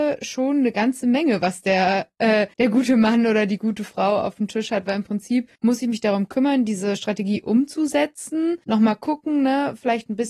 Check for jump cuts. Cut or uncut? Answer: cut